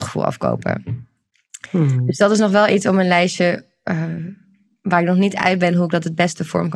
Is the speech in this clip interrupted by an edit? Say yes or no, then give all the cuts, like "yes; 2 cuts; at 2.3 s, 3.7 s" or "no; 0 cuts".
no; 0 cuts